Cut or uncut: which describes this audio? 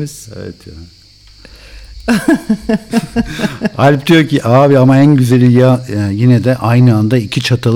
uncut